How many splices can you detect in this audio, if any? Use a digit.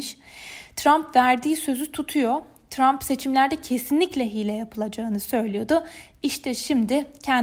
0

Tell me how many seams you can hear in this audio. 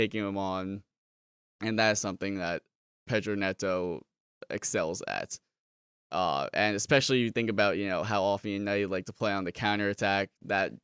0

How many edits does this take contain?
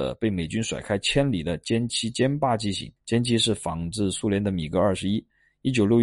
1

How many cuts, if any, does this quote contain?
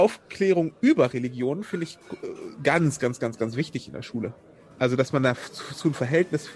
0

